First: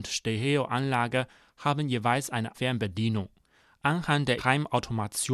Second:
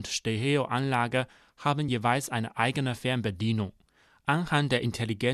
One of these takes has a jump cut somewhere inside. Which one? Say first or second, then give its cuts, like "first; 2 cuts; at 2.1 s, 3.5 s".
first; 2 cuts; at 2.5 s, 4.4 s